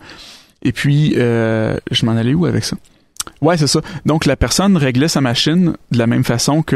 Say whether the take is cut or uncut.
uncut